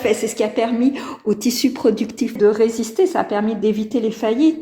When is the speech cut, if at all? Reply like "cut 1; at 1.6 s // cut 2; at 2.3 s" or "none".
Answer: cut 1; at 2.4 s